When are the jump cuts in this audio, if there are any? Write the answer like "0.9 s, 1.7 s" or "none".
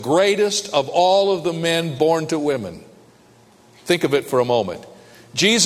none